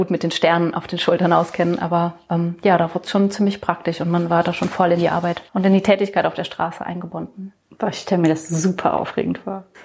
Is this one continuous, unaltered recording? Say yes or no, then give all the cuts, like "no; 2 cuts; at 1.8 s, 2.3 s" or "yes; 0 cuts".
no; 1 cut; at 5.5 s